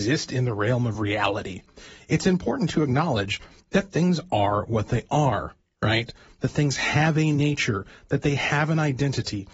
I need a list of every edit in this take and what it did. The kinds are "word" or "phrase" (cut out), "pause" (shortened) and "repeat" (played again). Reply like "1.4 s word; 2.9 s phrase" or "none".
none